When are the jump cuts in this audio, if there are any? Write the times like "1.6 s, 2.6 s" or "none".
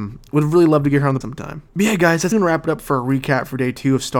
1.2 s, 1.7 s, 2.3 s